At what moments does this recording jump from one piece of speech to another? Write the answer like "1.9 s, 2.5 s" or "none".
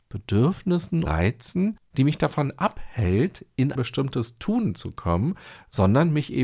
1.1 s, 3.8 s